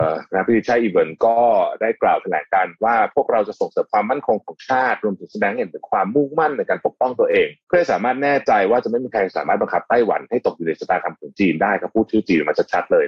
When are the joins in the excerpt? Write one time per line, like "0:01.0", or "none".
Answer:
0:07.6